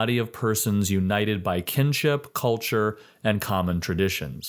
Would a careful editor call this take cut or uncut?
uncut